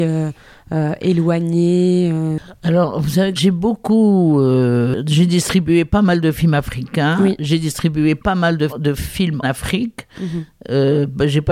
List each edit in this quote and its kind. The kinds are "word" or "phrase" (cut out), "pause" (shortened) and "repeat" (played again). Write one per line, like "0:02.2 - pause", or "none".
0:03.4 - word
0:08.7 - word
0:09.4 - word